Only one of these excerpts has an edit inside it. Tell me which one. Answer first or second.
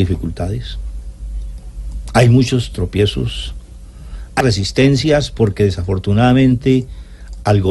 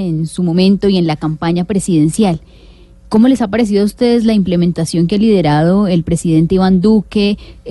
first